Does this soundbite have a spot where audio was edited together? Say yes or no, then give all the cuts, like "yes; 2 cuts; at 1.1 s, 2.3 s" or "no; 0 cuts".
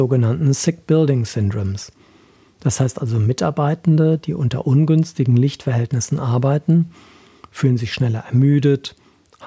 no; 0 cuts